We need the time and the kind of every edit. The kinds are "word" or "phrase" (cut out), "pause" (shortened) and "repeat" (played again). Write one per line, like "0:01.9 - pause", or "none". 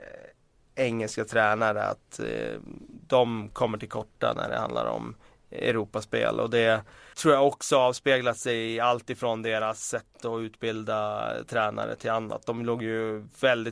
0:07.1 - word